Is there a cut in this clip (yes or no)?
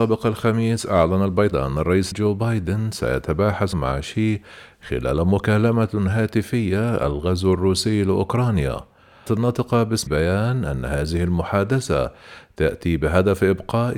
yes